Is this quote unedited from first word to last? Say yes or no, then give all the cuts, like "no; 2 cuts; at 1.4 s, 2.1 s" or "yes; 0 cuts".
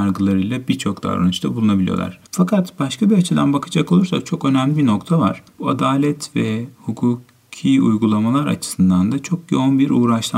no; 2 cuts; at 2.3 s, 5.5 s